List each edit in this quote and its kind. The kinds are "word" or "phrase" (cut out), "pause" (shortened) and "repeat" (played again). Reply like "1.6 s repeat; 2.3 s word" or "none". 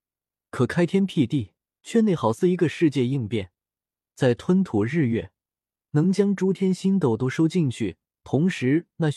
1.7 s pause